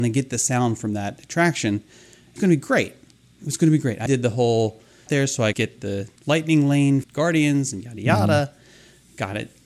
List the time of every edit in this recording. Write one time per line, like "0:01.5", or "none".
0:02.4
0:04.1
0:05.1
0:05.5
0:06.2
0:07.0